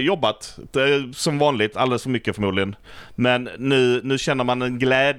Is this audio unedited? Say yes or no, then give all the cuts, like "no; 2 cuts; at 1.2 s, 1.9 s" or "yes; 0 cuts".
yes; 0 cuts